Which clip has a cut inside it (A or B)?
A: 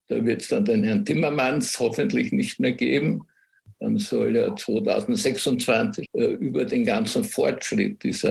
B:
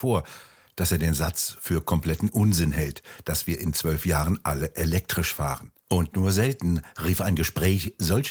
A